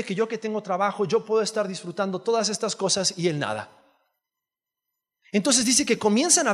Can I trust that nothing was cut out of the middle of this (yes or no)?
yes